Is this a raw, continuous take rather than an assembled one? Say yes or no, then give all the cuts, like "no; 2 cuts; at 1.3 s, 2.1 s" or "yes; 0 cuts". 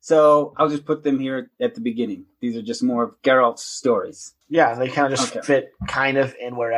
no; 1 cut; at 4.4 s